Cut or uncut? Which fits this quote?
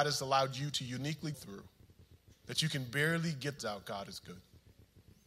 cut